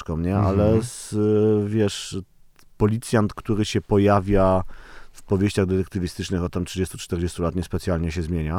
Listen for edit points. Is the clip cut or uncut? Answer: uncut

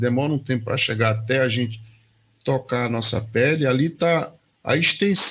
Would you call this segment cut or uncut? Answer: uncut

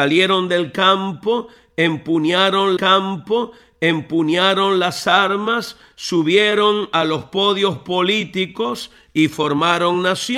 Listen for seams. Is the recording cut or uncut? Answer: cut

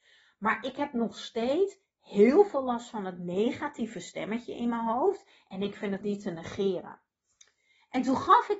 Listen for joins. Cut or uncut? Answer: cut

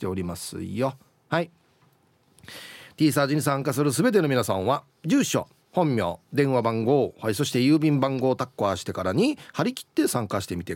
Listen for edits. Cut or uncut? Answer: uncut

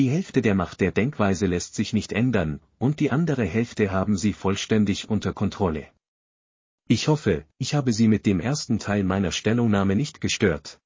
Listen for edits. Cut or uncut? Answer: uncut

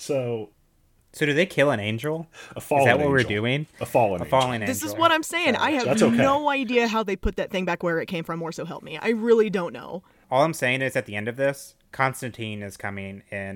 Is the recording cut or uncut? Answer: uncut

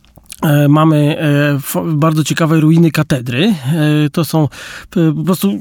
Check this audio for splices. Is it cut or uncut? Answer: uncut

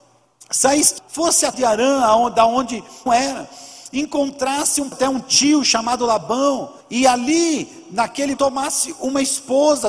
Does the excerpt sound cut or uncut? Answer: cut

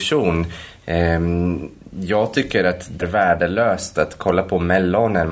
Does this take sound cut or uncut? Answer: cut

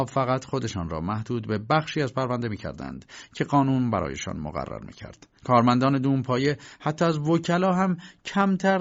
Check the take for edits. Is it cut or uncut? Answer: cut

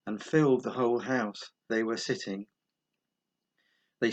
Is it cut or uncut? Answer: cut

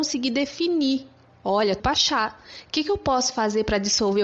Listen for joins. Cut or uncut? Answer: cut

